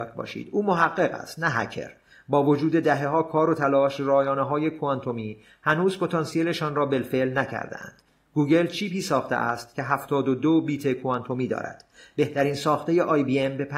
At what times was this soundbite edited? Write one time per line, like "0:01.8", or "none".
none